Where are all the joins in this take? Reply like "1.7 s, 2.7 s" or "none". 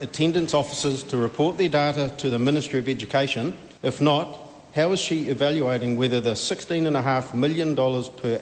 3.8 s

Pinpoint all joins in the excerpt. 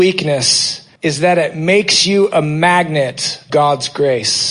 1.0 s, 3.5 s

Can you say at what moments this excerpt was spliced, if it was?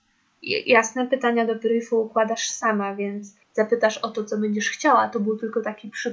3.4 s

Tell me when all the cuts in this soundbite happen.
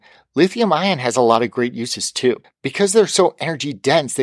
2.4 s

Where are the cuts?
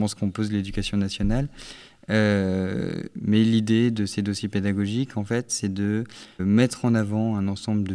6.4 s

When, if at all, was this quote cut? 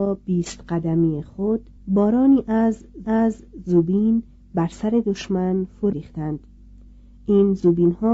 1.8 s, 3.0 s, 5.9 s

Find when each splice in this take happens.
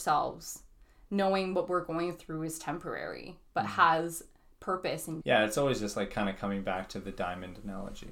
5.2 s

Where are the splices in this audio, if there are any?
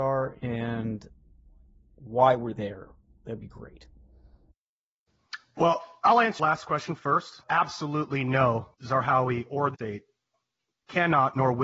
6.4 s, 8.7 s, 9.7 s

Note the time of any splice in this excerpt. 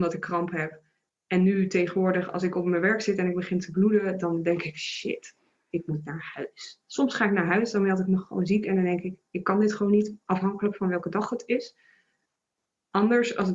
6.8 s

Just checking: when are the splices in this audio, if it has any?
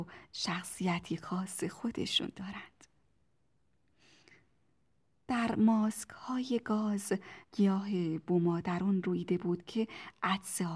7.4 s

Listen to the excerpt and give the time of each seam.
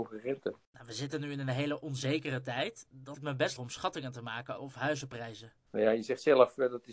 3.1 s, 3.6 s, 4.6 s

